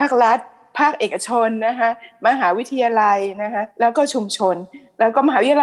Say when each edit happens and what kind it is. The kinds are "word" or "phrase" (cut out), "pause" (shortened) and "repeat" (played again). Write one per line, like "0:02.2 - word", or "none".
0:03.7 - pause